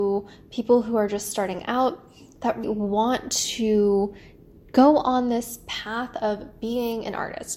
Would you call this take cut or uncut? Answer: cut